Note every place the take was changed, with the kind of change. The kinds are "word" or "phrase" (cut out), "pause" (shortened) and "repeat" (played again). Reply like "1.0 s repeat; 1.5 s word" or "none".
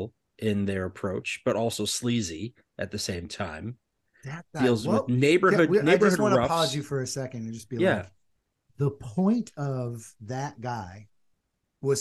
none